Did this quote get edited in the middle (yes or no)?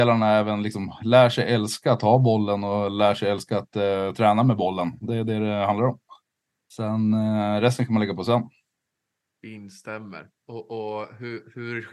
no